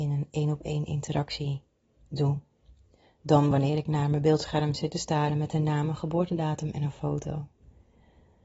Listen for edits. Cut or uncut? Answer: uncut